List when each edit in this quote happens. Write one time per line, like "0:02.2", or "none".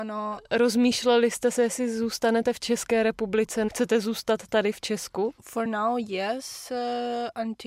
none